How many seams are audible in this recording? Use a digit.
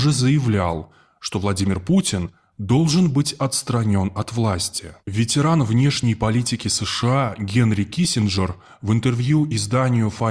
1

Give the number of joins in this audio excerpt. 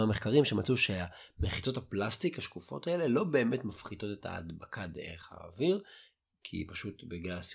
0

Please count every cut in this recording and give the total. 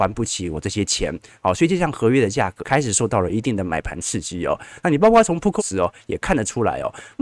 2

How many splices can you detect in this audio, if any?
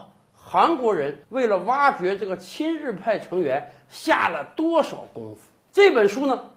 1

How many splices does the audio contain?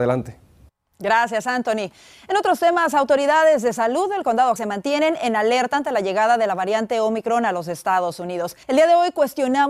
2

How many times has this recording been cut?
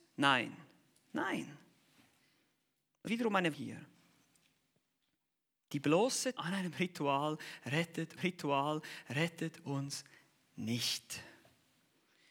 4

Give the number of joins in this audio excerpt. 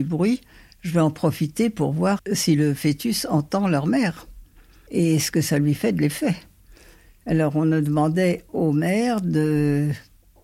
1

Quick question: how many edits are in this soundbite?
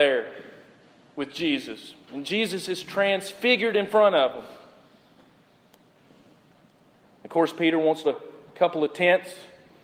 1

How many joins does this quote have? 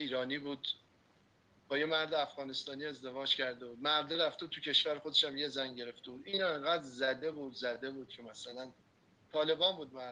0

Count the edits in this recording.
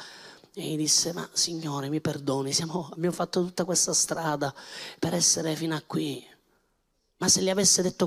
0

